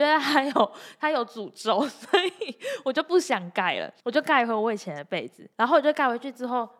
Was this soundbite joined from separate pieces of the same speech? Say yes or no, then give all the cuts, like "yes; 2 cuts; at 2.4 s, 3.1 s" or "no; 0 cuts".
yes; 2 cuts; at 4.0 s, 5.5 s